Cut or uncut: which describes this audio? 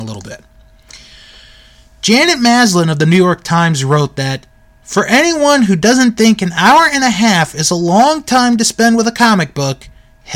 uncut